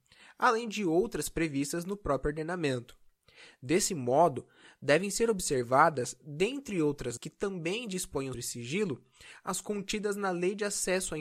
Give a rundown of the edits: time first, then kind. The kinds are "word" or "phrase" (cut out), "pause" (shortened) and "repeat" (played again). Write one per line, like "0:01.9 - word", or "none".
0:07.2 - word
0:08.3 - word